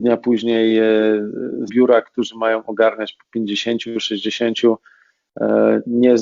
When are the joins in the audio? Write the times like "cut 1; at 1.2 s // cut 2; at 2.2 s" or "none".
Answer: cut 1; at 1.7 s